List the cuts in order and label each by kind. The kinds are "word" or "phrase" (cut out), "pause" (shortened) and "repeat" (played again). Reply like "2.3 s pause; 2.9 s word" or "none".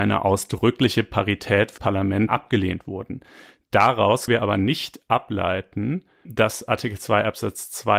1.8 s word; 2.3 s word; 4.3 s word; 6.2 s word